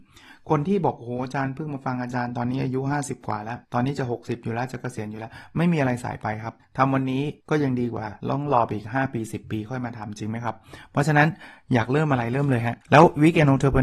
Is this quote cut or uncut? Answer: cut